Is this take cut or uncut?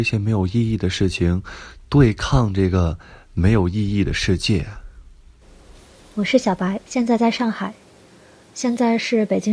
cut